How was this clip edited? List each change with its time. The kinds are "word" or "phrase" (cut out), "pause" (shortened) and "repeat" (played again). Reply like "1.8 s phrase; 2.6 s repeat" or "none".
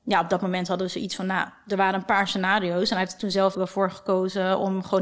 3.5 s word